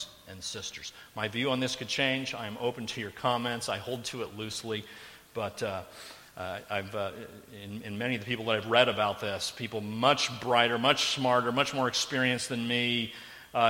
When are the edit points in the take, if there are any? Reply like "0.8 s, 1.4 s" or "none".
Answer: none